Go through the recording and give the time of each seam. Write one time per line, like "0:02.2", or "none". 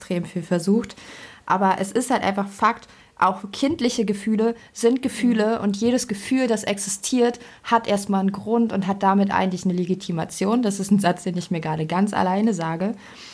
none